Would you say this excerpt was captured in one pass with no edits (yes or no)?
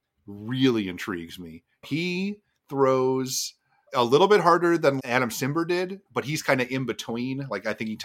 no